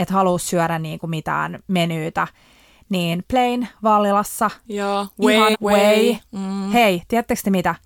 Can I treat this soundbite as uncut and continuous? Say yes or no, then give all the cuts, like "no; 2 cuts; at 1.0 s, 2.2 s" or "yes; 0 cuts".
no; 1 cut; at 5.5 s